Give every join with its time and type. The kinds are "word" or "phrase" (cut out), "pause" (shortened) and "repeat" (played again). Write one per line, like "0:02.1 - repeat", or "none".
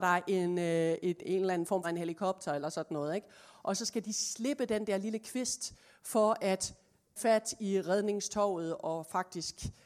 0:01.8 - phrase
0:07.2 - word

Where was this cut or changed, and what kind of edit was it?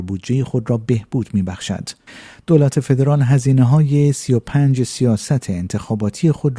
none

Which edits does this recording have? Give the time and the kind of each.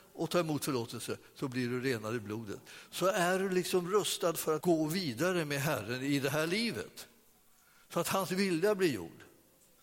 0:04.6 - word

